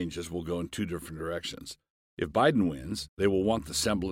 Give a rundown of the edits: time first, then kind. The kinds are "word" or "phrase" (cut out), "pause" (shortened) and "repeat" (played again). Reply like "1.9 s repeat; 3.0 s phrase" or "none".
none